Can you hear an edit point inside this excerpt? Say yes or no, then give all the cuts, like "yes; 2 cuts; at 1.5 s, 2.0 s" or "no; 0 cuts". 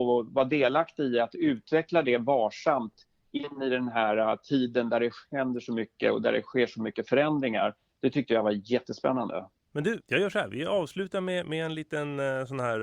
no; 0 cuts